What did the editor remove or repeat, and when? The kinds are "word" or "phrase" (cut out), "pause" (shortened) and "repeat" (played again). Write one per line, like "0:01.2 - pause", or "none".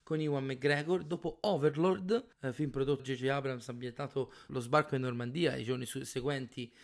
0:02.3 - pause
0:03.0 - word
0:04.5 - phrase